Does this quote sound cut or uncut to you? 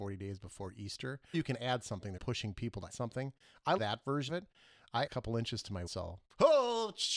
cut